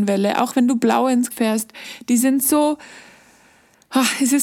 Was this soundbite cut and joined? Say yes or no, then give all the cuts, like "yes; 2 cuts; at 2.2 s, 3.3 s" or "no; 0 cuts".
yes; 1 cut; at 1.3 s